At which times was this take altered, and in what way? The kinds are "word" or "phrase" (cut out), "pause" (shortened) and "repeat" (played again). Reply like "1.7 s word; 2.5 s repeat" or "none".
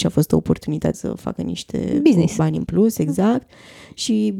0.9 s word